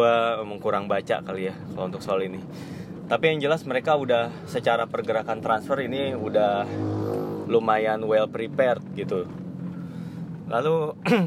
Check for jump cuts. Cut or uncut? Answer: uncut